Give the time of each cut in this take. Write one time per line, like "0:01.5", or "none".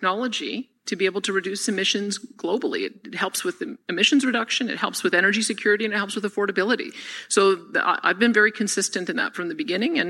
none